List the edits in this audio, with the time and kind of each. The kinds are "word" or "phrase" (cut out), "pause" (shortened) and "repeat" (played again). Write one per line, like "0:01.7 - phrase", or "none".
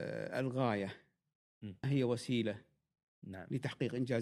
0:01.8 - word